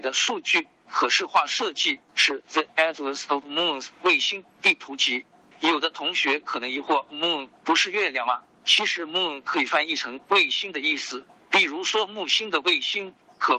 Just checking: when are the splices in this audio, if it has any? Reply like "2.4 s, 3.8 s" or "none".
2.1 s